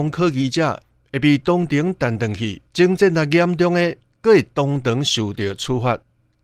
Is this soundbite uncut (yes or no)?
no